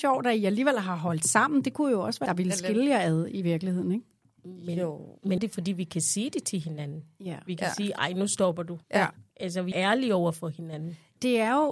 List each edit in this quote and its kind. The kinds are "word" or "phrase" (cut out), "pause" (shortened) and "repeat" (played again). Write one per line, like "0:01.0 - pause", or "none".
0:02.3 - phrase
0:05.4 - phrase
0:08.8 - pause
0:09.7 - word